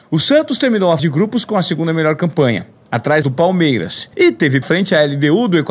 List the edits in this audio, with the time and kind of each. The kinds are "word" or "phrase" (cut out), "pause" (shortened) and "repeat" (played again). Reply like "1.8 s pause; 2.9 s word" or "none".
1.0 s word; 3.2 s word; 4.1 s pause; 4.6 s word